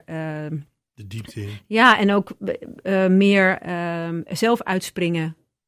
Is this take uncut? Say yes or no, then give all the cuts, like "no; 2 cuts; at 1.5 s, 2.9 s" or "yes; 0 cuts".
yes; 0 cuts